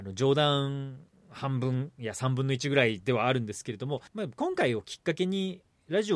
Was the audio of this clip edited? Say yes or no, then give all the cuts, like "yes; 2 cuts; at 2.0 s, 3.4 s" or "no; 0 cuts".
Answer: yes; 1 cut; at 4.1 s